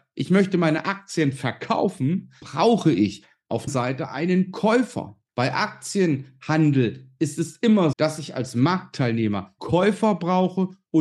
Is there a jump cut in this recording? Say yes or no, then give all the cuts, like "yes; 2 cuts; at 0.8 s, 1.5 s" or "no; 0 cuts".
yes; 5 cuts; at 2.4 s, 3.7 s, 5.3 s, 7.9 s, 9.6 s